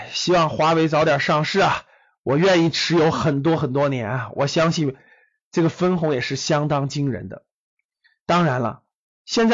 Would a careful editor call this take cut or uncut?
uncut